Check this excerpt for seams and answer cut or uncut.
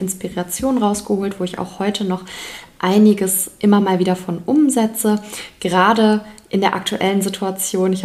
uncut